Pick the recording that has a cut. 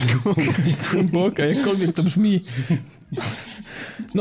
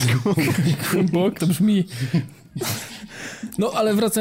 second; 1 cut; at 1.4 s

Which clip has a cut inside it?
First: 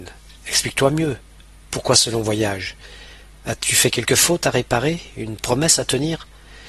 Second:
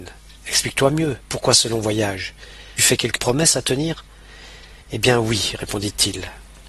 second; 4 cuts; at 1.2 s, 2.8 s, 3.2 s, 4.8 s

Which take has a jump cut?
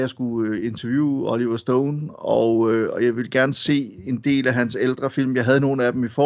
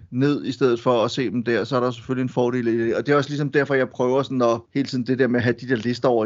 second; 1 cut; at 4.7 s

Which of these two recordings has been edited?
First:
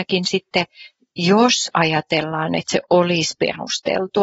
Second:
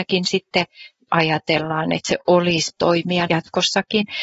second; 3 cuts; at 1.1 s, 2.7 s, 3.3 s

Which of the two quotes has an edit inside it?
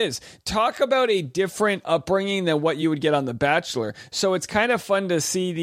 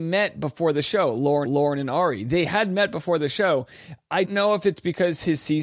second; 2 cuts; at 1.4 s, 4.2 s

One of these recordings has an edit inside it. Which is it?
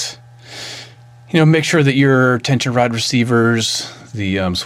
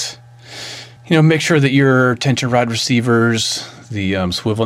second; 1 cut; at 1.0 s

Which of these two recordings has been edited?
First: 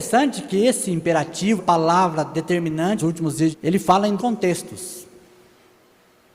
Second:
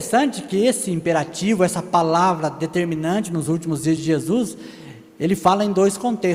first; 4 cuts; at 1.6 s, 3.0 s, 3.5 s, 4.2 s

